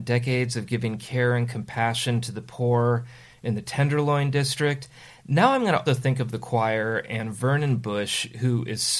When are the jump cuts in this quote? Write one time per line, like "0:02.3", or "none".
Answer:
0:05.9